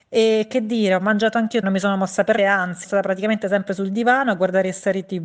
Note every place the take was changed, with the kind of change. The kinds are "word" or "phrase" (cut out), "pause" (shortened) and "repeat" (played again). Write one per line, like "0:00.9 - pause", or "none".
0:01.6 - word
0:02.4 - word
0:02.8 - word